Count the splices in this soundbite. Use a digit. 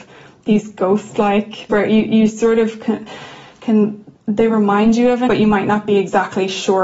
3